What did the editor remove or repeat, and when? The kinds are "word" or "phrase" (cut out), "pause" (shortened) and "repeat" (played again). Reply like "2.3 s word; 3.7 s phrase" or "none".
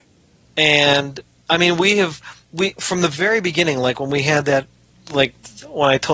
none